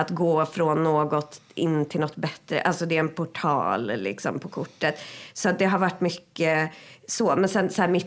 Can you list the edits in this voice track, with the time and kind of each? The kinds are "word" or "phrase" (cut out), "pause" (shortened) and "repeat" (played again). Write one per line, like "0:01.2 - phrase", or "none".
none